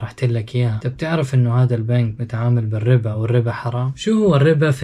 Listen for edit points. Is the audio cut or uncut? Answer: uncut